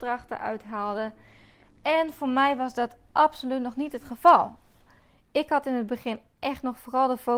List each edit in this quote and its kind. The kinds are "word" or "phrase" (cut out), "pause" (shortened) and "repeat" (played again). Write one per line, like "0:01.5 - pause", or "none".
none

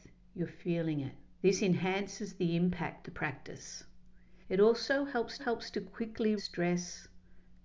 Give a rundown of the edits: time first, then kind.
0:01.4 - pause
0:03.0 - word
0:04.4 - pause
0:05.4 - repeat
0:06.4 - word

